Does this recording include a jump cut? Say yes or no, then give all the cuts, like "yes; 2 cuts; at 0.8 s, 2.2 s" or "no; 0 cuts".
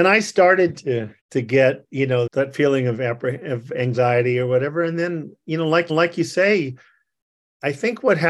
yes; 3 cuts; at 1.2 s, 2.3 s, 5.9 s